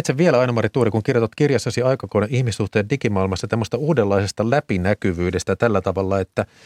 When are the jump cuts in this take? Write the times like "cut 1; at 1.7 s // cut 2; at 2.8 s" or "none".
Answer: none